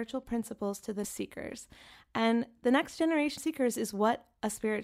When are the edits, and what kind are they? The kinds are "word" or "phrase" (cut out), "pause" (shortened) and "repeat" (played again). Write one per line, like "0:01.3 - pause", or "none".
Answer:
0:01.0 - phrase
0:03.4 - word